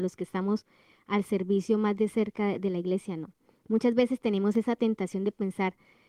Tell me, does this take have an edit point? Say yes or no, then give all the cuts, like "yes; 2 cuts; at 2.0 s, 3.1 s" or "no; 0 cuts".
no; 0 cuts